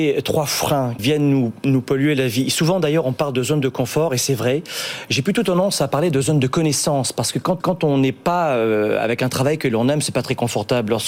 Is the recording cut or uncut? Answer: cut